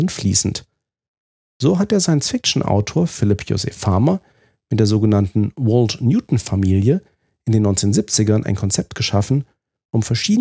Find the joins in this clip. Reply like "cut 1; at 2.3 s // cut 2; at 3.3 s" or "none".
none